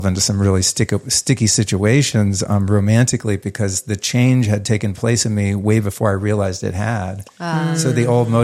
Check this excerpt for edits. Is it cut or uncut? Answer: uncut